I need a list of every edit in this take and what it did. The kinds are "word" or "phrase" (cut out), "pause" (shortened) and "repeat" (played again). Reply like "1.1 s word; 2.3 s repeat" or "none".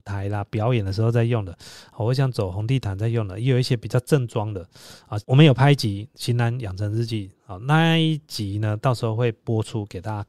5.2 s pause